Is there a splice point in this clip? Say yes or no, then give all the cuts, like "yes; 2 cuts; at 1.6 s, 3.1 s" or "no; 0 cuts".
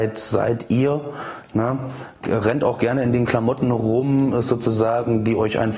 no; 0 cuts